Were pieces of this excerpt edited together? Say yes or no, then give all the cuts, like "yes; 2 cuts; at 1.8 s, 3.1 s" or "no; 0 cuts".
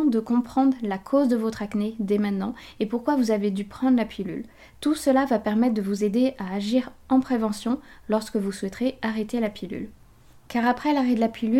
no; 0 cuts